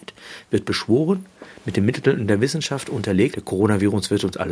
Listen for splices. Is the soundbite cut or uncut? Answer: cut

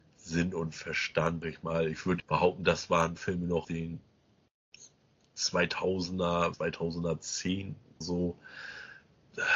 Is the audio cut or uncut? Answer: cut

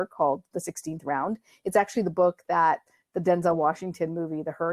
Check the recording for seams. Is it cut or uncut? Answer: uncut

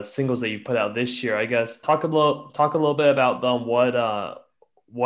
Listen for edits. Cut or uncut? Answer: cut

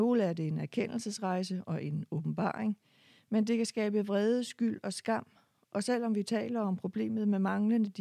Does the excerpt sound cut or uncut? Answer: uncut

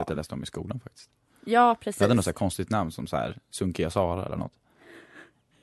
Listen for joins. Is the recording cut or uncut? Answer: uncut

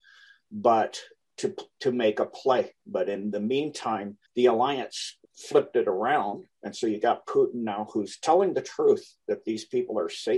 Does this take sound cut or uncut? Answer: cut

